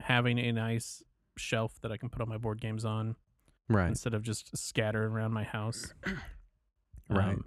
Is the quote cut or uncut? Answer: uncut